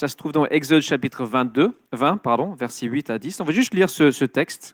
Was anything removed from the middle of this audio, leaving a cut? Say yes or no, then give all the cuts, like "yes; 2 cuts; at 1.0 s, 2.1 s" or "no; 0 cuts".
yes; 1 cut; at 1.9 s